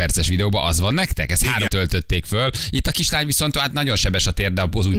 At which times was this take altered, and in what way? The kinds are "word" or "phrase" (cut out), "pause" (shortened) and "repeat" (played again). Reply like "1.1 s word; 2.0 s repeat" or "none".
1.7 s word